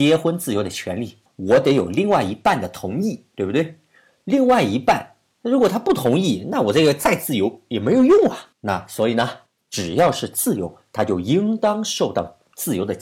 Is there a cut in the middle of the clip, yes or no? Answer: yes